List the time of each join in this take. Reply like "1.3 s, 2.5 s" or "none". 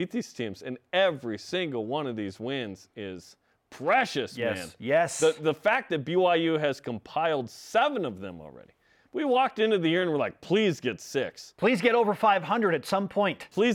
none